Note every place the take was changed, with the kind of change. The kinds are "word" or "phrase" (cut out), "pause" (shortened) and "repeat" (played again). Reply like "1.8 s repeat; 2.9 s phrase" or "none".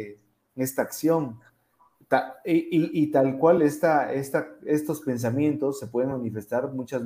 none